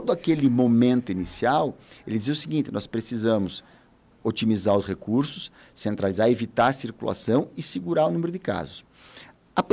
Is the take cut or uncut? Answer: uncut